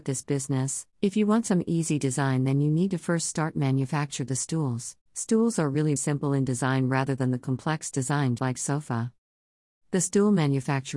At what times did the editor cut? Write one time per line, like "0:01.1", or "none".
0:00.9
0:05.1
0:06.0
0:08.4